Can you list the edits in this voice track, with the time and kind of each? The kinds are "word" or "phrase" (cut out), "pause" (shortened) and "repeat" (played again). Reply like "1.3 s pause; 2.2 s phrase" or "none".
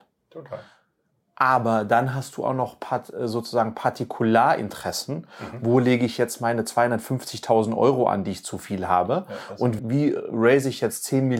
9.8 s word